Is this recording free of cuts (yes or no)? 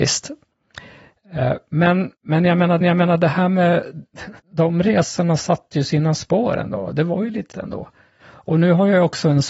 no